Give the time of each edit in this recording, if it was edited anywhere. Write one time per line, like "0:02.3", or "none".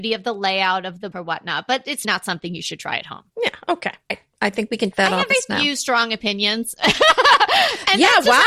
0:01.1
0:02.0
0:03.3
0:04.1
0:04.9
0:05.3